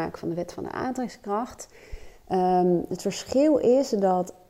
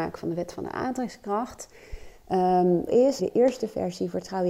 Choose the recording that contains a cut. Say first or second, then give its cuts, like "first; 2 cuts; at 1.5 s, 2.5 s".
second; 2 cuts; at 2.9 s, 3.2 s